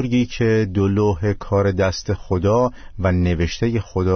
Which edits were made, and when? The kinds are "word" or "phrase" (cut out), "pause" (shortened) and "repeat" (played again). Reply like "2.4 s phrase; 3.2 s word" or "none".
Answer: none